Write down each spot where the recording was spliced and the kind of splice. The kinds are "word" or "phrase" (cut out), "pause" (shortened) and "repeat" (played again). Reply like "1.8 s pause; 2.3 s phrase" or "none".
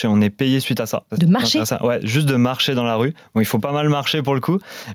none